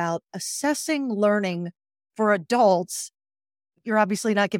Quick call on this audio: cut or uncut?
uncut